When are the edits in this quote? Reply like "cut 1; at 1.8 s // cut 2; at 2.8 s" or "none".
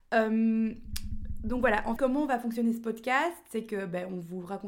cut 1; at 2.0 s